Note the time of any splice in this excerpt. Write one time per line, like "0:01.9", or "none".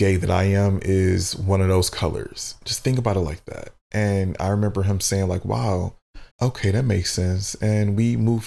0:06.3